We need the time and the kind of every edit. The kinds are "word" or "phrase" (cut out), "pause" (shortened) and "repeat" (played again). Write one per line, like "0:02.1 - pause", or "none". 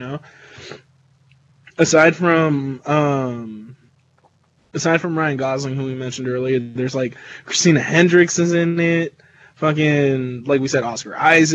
none